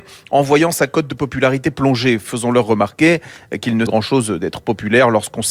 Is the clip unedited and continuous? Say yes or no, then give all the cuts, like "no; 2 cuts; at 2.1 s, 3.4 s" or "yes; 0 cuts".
no; 1 cut; at 3.9 s